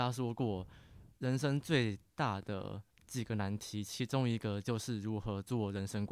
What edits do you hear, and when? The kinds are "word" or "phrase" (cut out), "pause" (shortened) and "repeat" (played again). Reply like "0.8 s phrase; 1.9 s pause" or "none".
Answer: 2.9 s pause